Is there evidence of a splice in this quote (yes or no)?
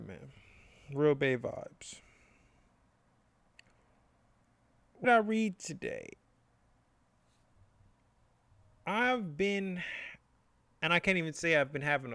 yes